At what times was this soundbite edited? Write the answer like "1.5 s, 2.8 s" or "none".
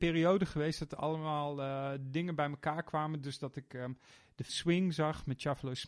4.5 s